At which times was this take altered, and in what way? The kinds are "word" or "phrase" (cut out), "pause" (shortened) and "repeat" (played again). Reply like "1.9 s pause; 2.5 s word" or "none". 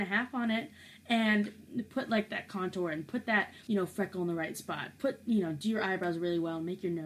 none